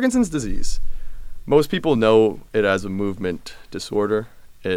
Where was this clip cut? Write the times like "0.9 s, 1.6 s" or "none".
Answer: none